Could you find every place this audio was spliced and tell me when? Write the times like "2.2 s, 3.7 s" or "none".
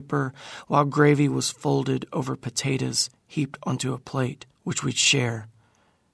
4.5 s